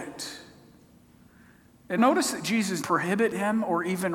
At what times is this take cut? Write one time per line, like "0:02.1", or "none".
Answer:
0:02.0
0:02.8